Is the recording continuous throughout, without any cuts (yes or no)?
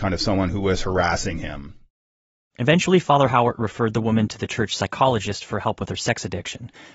yes